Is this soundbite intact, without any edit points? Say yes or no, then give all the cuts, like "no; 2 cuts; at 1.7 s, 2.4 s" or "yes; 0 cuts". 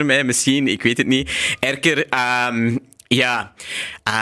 yes; 0 cuts